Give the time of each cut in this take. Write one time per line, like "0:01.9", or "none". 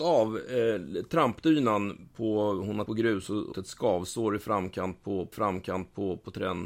0:02.9
0:03.5
0:05.3

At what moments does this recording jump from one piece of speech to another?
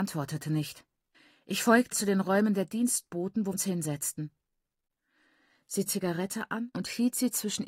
0:01.1
0:01.9
0:03.5
0:05.9

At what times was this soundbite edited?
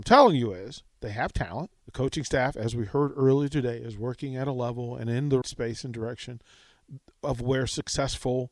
0:01.8
0:05.4

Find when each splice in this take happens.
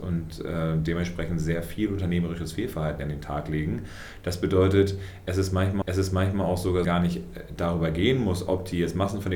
0:05.8
0:06.8

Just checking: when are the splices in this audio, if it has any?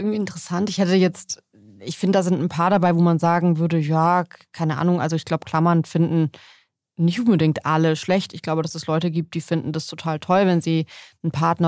none

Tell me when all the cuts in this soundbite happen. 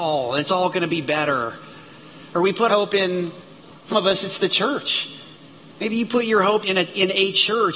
0:02.7
0:03.9
0:06.6

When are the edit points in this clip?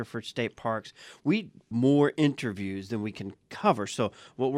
0:01.7

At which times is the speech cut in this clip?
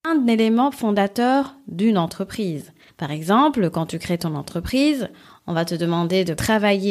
none

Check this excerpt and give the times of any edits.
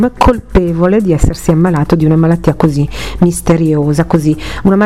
none

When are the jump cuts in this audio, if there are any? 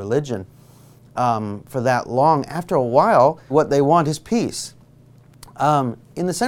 0:03.5

